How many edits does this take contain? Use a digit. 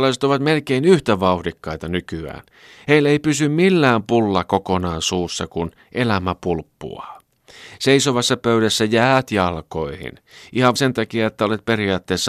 1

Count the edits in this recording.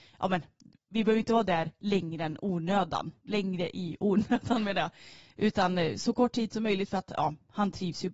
0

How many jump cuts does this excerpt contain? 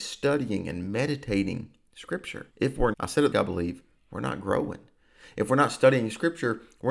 3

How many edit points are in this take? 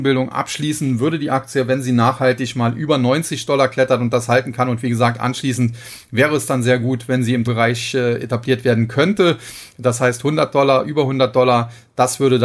1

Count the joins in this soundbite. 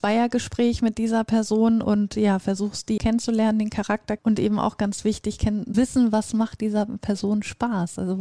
3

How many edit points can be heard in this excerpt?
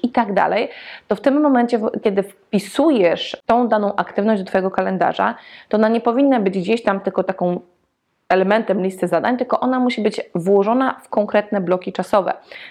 0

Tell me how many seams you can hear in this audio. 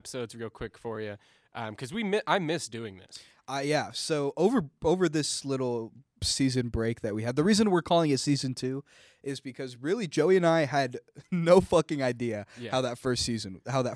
0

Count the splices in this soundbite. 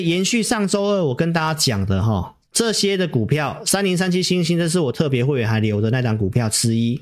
1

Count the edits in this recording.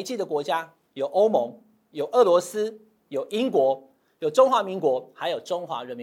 0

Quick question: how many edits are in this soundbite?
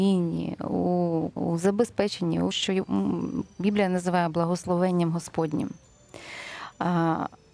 2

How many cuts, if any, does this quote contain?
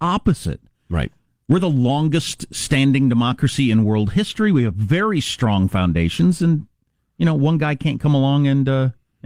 0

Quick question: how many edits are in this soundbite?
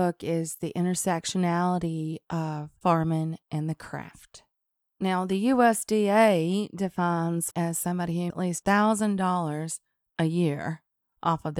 3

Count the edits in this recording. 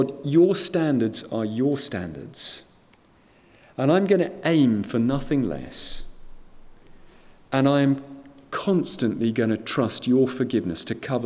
0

